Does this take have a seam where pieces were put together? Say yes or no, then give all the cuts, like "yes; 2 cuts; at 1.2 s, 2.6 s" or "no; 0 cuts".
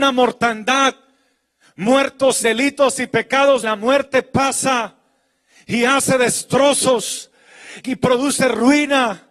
yes; 3 cuts; at 2.4 s, 3.6 s, 7.8 s